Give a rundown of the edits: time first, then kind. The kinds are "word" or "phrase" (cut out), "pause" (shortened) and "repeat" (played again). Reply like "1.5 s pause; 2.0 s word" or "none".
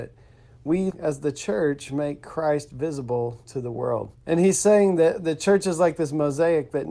0.9 s word; 4.2 s pause